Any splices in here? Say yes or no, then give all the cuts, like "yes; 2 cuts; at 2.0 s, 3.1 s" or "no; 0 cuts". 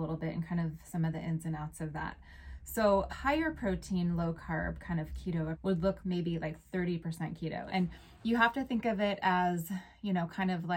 yes; 3 cuts; at 3.1 s, 5.5 s, 6.0 s